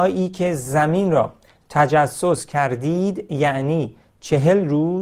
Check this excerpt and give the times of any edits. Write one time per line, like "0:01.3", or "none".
none